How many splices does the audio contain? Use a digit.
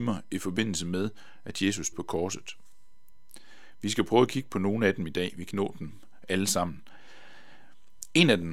2